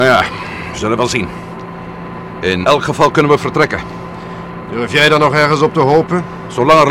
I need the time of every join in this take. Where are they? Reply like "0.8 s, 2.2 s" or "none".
2.6 s